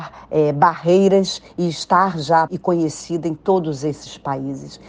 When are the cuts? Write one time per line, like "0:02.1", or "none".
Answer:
0:02.5